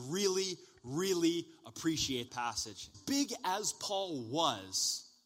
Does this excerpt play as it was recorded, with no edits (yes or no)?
no